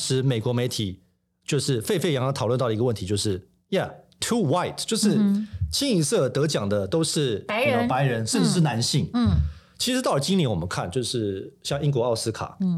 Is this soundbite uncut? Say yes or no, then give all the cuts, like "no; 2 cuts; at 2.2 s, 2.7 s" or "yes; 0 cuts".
yes; 0 cuts